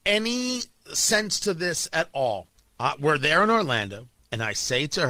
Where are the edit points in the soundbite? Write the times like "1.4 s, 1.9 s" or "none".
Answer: 2.5 s